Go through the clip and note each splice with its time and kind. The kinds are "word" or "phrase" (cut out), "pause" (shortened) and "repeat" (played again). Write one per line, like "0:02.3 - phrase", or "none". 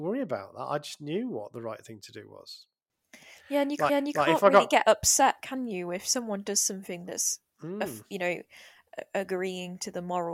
0:03.9 - repeat